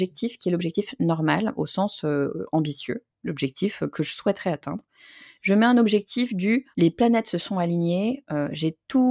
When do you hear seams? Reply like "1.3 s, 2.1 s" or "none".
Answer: 3.1 s, 6.7 s